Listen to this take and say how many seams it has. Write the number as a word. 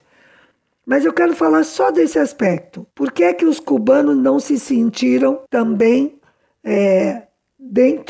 two